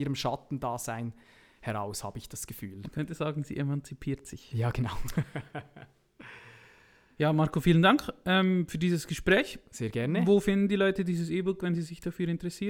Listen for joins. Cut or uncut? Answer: uncut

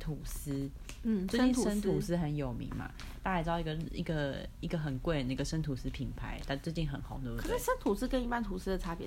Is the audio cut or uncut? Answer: uncut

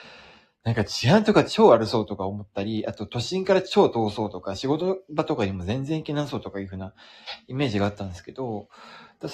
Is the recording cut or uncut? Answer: uncut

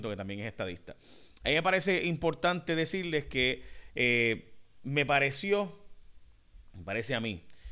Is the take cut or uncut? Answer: uncut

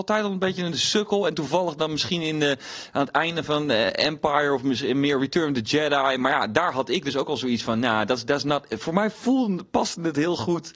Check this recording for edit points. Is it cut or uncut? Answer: uncut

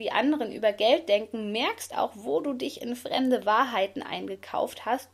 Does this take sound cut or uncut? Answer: cut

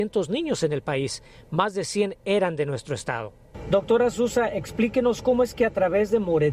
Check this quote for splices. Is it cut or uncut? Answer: uncut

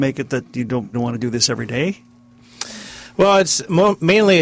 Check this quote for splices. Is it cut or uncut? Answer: cut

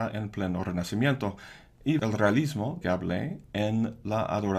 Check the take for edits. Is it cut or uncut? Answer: cut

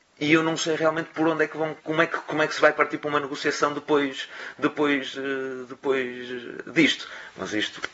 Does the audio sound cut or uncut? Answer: cut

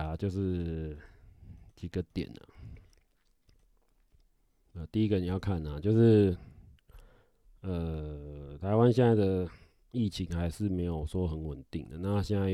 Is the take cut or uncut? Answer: uncut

